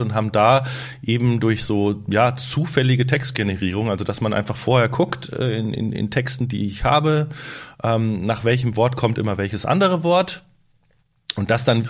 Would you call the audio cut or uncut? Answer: uncut